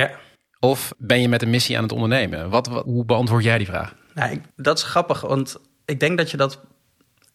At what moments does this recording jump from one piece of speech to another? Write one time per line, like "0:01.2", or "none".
0:00.9
0:02.9
0:04.5